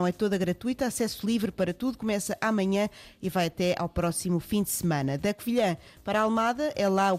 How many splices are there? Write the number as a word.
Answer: zero